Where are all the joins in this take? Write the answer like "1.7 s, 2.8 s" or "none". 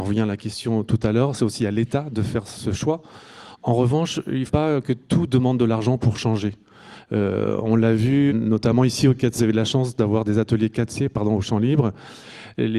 4.5 s, 4.8 s, 8.3 s, 9.4 s